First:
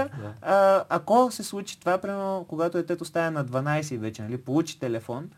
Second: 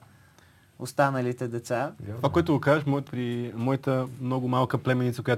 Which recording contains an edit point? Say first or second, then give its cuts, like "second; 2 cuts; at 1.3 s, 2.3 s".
second; 1 cut; at 3.1 s